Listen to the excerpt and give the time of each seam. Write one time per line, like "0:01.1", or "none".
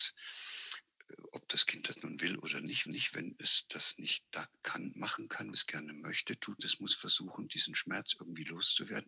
0:02.9
0:05.5
0:06.6